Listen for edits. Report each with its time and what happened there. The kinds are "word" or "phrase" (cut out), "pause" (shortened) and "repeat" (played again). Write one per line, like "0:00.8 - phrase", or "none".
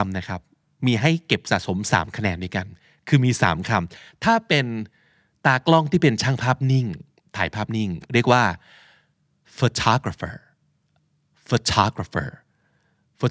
none